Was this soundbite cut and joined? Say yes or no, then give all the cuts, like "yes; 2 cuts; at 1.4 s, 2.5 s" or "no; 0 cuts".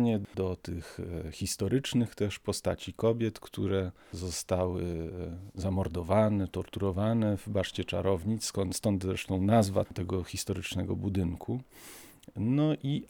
yes; 1 cut; at 9.9 s